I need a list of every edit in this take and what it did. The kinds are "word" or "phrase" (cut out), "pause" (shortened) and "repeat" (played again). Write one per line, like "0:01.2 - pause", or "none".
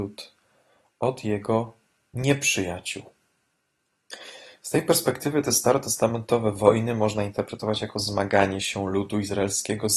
none